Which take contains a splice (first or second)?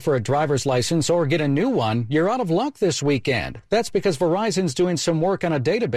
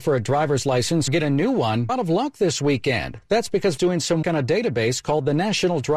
second